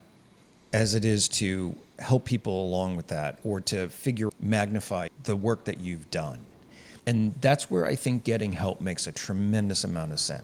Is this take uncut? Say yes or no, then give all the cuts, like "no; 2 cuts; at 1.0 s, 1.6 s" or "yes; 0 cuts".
no; 3 cuts; at 4.3 s, 5.1 s, 7.0 s